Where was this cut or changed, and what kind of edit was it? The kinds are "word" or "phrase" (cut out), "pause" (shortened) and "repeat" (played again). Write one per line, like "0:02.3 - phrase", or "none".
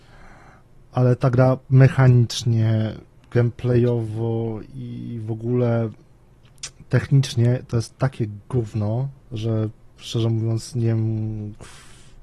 0:01.6 - pause
0:09.2 - pause